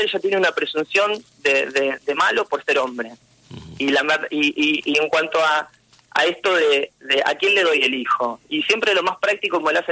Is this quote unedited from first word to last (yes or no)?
yes